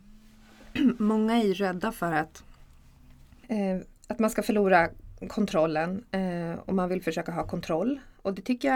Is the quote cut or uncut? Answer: uncut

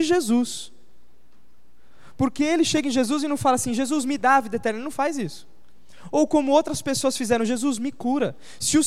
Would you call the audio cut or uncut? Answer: uncut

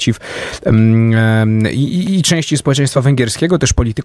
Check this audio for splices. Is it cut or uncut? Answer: uncut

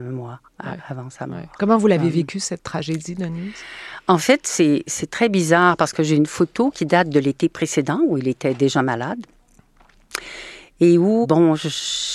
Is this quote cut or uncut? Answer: cut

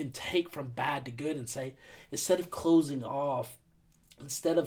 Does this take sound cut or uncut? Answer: uncut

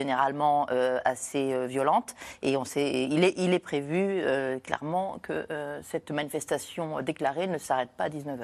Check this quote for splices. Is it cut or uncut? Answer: uncut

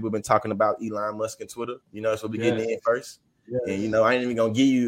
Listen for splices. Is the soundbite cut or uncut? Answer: cut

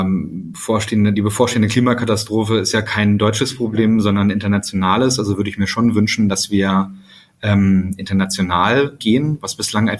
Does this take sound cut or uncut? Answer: cut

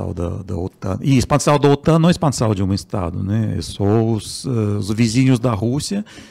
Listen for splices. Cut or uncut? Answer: uncut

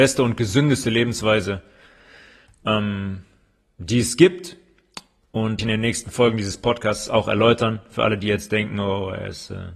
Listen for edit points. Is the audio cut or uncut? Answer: cut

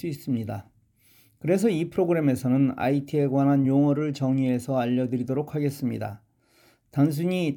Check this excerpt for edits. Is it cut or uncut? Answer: uncut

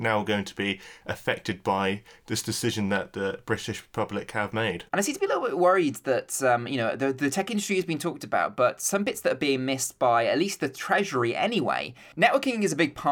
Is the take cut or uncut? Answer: cut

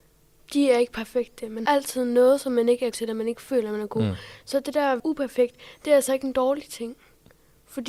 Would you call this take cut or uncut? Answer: cut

